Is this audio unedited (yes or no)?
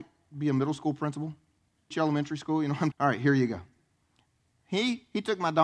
no